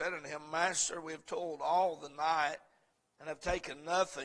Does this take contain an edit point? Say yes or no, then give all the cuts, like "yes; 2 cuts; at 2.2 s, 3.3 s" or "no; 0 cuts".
no; 0 cuts